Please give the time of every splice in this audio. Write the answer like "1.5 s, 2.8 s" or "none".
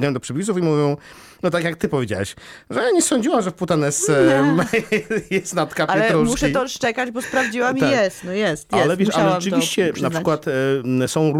none